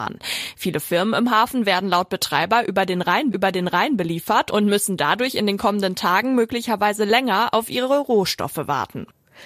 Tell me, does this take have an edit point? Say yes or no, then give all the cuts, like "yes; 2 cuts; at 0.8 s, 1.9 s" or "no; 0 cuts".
yes; 1 cut; at 3.3 s